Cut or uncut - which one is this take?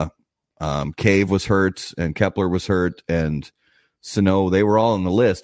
uncut